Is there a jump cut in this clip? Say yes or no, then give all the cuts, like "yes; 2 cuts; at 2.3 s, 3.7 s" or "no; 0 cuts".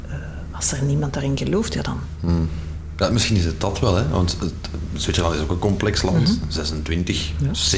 no; 0 cuts